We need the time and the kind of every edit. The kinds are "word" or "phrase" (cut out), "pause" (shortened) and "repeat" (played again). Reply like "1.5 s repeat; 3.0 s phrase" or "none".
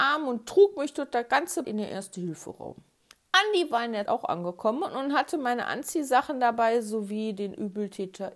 1.6 s word; 3.0 s pause; 4.1 s word